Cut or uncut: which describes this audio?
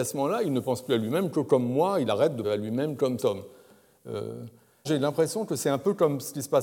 cut